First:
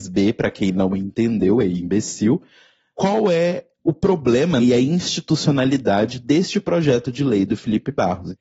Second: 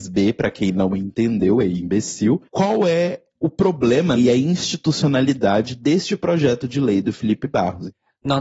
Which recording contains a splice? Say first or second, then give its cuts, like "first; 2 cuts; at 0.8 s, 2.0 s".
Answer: second; 1 cut; at 2.5 s